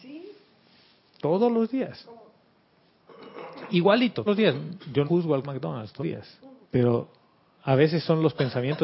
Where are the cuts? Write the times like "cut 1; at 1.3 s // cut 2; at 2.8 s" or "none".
cut 1; at 4.3 s // cut 2; at 5.0 s // cut 3; at 5.4 s // cut 4; at 6.0 s // cut 5; at 6.6 s

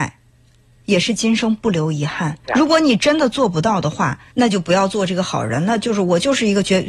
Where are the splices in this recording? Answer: cut 1; at 2.4 s // cut 2; at 4.3 s

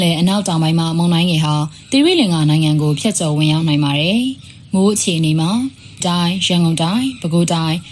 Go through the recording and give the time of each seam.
cut 1; at 6.0 s

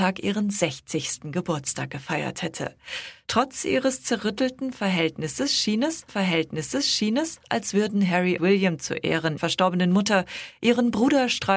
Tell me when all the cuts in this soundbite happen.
cut 1; at 6.1 s // cut 2; at 8.4 s // cut 3; at 9.4 s

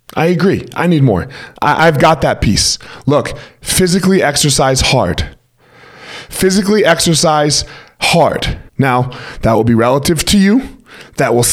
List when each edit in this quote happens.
cut 1; at 1.6 s // cut 2; at 8.7 s

